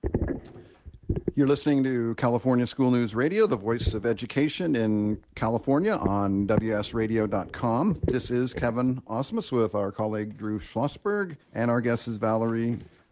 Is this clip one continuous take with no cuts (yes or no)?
no